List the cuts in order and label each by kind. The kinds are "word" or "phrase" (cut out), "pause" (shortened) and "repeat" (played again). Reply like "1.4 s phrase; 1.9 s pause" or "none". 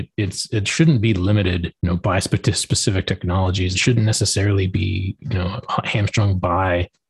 1.8 s pause; 3.7 s word